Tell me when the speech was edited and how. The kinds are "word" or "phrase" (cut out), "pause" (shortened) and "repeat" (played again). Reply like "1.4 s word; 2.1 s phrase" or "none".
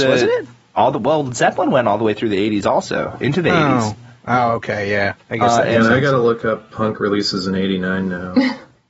none